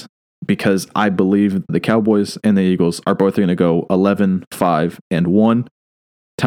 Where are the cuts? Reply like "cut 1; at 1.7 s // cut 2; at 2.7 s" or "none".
cut 1; at 1.7 s